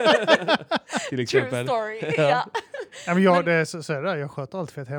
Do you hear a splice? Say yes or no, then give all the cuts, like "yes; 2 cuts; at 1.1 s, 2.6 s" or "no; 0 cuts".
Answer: no; 0 cuts